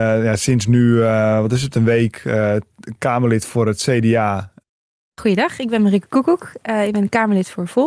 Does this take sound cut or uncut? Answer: uncut